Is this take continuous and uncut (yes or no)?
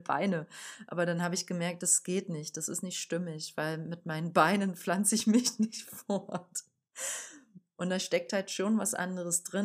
yes